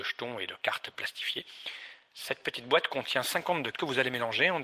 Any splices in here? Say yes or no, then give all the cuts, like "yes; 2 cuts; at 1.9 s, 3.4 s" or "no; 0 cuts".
yes; 1 cut; at 3.7 s